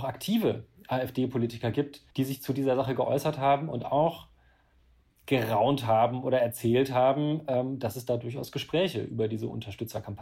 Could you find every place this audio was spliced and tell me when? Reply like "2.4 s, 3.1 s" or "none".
2.1 s